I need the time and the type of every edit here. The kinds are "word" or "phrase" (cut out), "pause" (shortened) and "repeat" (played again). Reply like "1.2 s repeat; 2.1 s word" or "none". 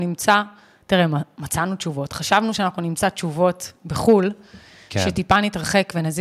none